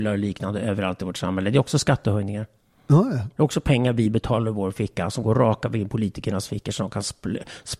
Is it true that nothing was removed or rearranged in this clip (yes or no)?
yes